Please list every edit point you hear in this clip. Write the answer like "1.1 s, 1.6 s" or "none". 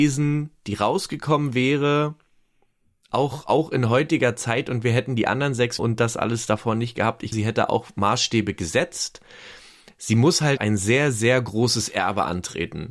5.8 s, 7.3 s, 10.6 s